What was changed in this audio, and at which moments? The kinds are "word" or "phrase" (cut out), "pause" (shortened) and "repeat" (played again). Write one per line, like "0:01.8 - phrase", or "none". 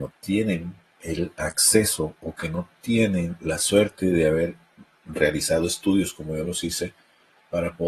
none

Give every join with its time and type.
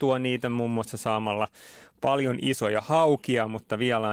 none

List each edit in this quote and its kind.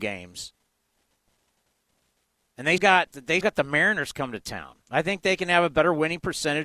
0:02.8 - word
0:03.4 - word
0:04.8 - pause

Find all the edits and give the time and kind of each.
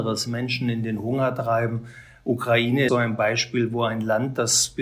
0:02.9 - word

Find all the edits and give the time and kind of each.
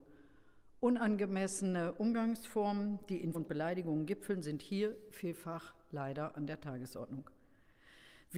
0:03.3 - word

